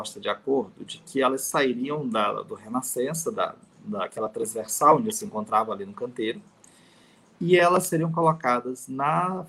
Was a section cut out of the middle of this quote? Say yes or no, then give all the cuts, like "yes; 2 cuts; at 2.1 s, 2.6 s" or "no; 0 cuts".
no; 0 cuts